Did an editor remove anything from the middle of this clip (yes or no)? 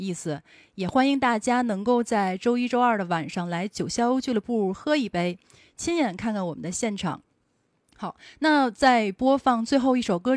no